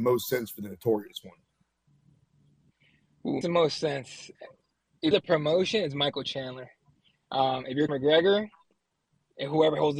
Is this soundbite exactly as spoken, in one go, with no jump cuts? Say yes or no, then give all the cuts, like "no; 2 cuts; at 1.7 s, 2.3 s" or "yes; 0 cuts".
no; 3 cuts; at 3.4 s, 5.1 s, 7.9 s